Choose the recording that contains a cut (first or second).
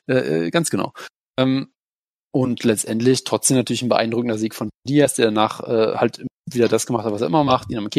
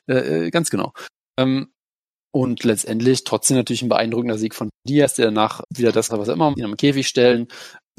second